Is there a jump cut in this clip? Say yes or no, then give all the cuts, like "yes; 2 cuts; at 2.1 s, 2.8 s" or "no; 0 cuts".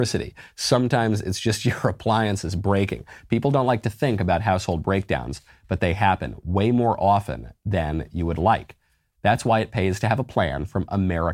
no; 0 cuts